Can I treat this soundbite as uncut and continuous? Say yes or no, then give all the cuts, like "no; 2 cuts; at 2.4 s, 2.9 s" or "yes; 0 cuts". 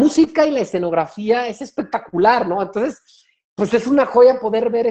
yes; 0 cuts